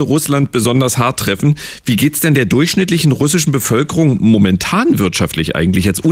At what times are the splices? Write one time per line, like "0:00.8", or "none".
none